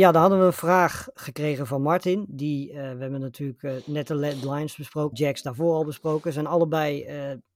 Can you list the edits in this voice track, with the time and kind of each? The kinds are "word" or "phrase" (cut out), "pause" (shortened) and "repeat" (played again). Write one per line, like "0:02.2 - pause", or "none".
0:01.1 - word
0:05.1 - word